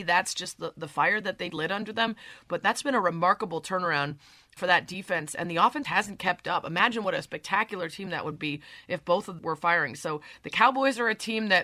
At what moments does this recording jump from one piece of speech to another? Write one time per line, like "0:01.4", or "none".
0:01.5
0:04.6
0:05.8
0:09.4